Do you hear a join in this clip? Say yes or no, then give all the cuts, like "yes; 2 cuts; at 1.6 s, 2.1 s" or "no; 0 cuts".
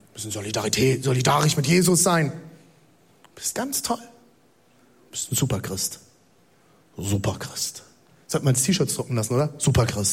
no; 0 cuts